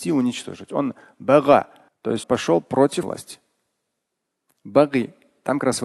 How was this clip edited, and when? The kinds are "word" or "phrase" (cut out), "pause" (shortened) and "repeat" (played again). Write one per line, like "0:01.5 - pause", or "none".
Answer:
0:01.9 - pause
0:02.2 - word
0:03.0 - word